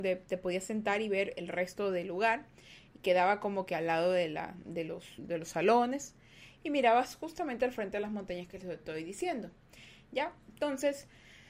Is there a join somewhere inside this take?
yes; 1 cut; at 5.2 s

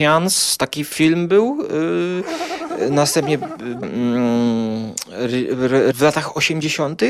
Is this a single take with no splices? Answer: no; 2 cuts; at 3.8 s, 5.9 s

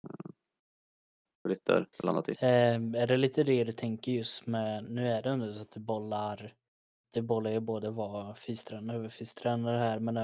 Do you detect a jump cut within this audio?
yes; 1 cut; at 1.9 s

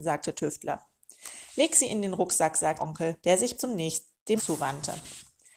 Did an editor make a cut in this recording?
yes; 4 cuts; at 2.8 s, 3.2 s, 3.6 s, 4.4 s

